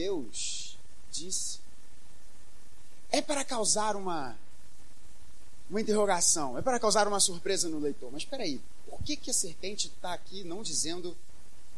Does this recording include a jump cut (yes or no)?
no